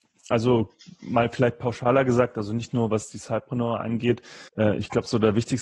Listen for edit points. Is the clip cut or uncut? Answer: cut